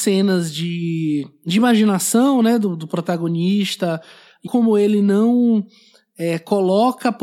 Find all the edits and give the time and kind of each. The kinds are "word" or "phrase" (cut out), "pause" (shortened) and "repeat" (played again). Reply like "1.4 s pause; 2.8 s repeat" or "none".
4.5 s phrase